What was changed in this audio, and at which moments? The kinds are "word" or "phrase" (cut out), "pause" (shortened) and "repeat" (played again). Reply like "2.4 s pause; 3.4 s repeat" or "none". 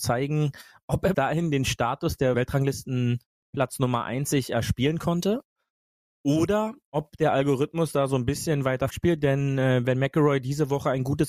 1.1 s word; 2.3 s word; 8.9 s word